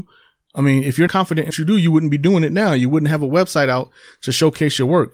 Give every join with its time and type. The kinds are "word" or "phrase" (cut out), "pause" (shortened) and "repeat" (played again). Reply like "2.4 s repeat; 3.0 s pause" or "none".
1.1 s word; 1.5 s word

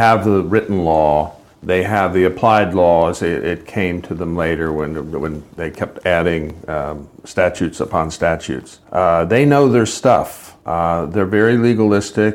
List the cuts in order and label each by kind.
1.5 s pause; 8.8 s pause; 10.6 s pause

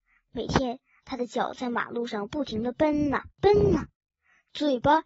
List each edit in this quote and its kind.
3.3 s pause

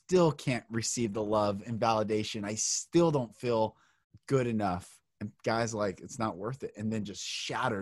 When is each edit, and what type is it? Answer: 4.0 s pause; 5.1 s pause

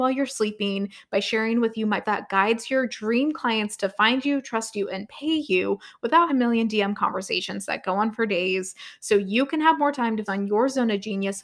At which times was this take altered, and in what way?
2.0 s word; 6.3 s word; 10.3 s word

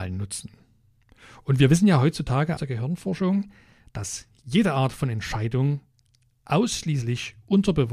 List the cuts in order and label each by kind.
2.6 s word

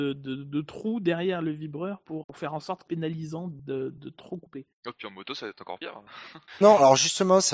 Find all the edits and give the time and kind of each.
2.2 s word; 2.9 s phrase; 6.6 s word

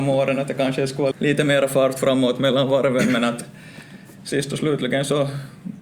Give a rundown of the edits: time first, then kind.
1.1 s word

